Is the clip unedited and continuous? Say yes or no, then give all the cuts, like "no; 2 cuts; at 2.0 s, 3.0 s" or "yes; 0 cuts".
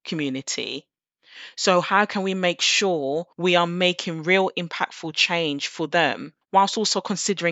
no; 2 cuts; at 3.3 s, 6.4 s